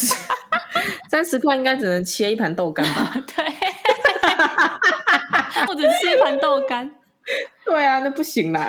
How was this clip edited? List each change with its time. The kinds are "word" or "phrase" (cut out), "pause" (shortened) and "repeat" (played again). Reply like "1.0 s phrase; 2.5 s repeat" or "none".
5.7 s word